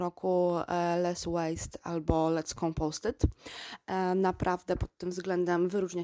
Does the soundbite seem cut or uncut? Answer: uncut